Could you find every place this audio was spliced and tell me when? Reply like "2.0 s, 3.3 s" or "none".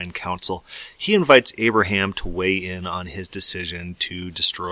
none